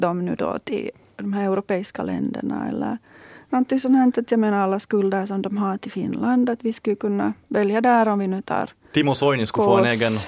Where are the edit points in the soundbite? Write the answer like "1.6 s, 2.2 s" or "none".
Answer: none